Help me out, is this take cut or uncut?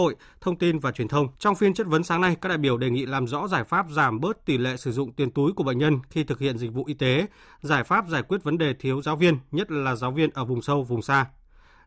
cut